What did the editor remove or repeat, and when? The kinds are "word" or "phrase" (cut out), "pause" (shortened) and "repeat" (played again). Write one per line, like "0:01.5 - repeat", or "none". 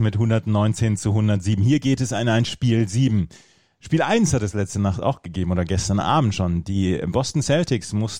none